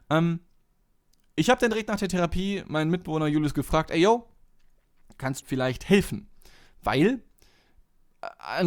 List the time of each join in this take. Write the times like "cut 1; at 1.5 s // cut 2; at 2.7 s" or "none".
cut 1; at 5.4 s